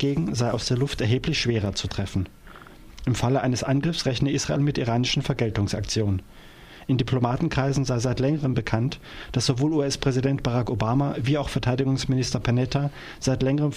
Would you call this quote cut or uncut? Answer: uncut